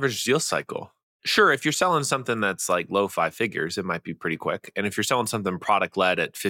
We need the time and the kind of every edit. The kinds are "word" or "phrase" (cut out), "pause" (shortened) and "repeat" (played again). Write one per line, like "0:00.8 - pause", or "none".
none